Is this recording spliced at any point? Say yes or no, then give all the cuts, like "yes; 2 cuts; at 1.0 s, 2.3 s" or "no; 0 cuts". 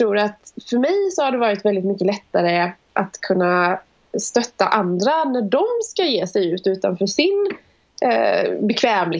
no; 0 cuts